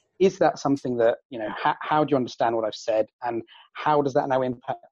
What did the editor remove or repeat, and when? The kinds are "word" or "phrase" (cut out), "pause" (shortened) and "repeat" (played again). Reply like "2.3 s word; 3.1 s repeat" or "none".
none